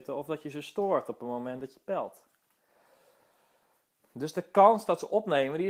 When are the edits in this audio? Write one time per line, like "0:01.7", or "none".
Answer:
none